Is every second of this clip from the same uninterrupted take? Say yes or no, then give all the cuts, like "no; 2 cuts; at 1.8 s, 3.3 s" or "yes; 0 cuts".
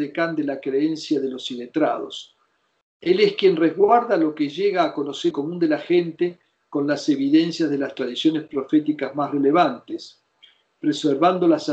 no; 1 cut; at 5.3 s